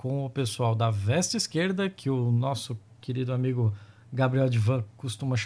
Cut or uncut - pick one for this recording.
uncut